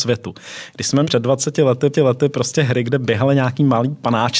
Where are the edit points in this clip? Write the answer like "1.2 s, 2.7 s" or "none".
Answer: 1.0 s, 1.9 s